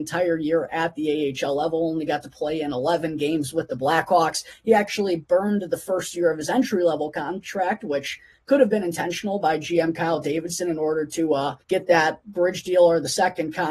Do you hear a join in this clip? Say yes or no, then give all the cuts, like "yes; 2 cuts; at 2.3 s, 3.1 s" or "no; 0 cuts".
yes; 1 cut; at 11.6 s